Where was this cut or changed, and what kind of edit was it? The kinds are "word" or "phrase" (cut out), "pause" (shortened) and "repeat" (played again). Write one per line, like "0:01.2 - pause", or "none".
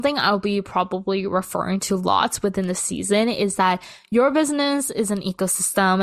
none